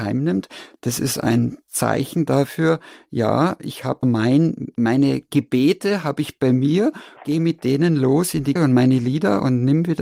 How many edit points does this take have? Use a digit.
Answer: 4